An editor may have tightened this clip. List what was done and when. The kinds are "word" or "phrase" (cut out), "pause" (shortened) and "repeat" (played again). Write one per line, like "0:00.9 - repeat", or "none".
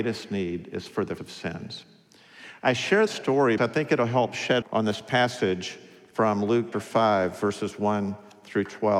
0:01.2 - word
0:03.1 - word
0:03.6 - word
0:04.6 - word
0:06.7 - word